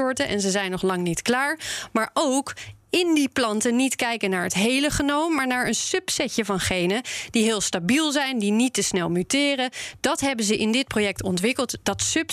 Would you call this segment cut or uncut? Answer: uncut